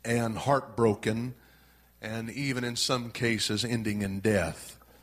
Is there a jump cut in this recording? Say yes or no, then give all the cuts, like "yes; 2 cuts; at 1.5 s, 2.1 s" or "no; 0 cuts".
no; 0 cuts